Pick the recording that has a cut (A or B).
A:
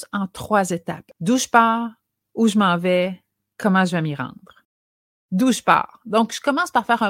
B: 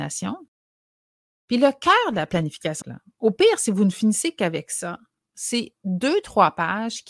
B